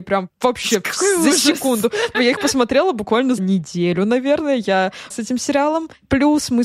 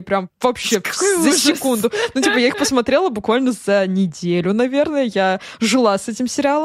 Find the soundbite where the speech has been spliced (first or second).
first